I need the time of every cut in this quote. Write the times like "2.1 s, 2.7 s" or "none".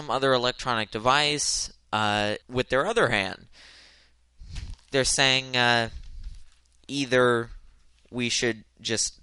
2.4 s, 4.9 s